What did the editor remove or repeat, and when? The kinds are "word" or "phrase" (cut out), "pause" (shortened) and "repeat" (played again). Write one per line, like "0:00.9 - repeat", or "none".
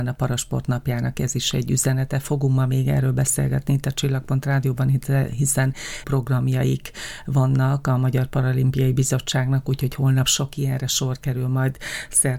0:06.0 - word